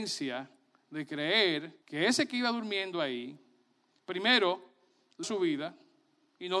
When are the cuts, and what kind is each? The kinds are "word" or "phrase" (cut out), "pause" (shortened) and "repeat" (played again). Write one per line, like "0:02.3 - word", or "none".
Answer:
0:01.8 - pause
0:05.2 - word